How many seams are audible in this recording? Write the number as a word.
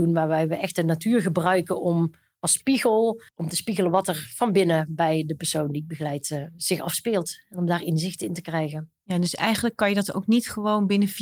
one